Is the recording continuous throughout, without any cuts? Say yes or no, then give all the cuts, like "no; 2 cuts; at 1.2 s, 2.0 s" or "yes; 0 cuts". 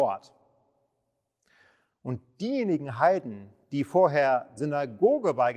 no; 2 cuts; at 3.6 s, 4.6 s